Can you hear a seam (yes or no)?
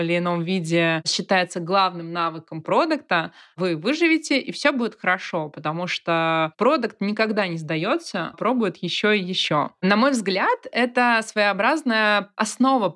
yes